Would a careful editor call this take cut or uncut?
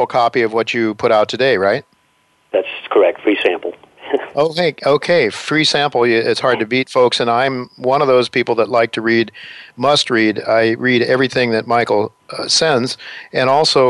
uncut